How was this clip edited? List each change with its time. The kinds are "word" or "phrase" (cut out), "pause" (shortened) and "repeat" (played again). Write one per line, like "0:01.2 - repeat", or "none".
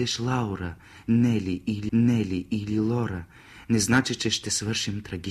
0:01.9 - repeat

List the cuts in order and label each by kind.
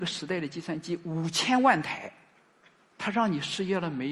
0:02.6 - pause

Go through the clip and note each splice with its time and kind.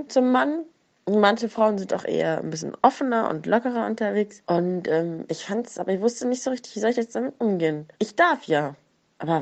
0:07.9 - pause

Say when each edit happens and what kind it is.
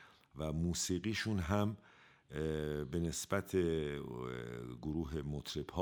none

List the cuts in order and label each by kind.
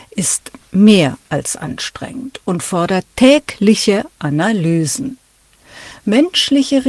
none

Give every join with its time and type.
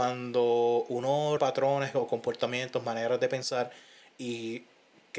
0:01.4 - word

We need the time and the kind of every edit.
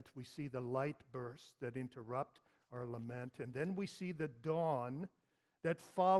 none

